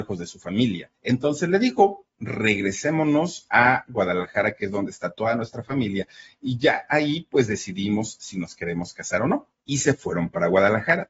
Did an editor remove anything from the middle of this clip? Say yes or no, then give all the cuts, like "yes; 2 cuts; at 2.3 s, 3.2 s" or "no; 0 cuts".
yes; 2 cuts; at 0.9 s, 9.5 s